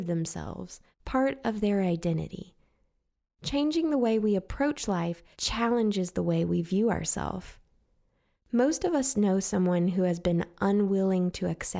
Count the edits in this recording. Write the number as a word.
two